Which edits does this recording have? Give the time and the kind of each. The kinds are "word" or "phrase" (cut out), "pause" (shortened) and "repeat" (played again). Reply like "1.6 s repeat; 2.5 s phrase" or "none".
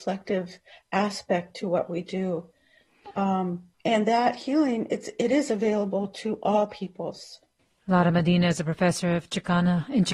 3.7 s pause; 7.6 s pause